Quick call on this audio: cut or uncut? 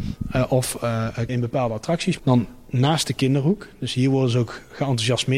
cut